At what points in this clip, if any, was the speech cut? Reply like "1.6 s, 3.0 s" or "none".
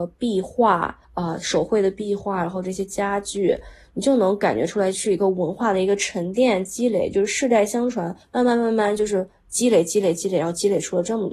1.0 s, 8.2 s

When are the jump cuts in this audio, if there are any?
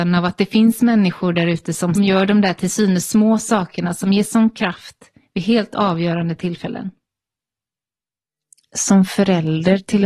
2.0 s

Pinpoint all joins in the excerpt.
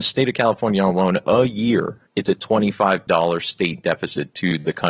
3.1 s

